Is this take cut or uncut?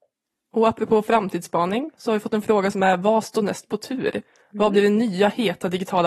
uncut